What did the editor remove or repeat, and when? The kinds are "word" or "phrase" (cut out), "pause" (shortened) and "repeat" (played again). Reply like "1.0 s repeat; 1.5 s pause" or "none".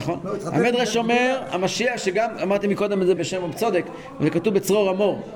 3.2 s word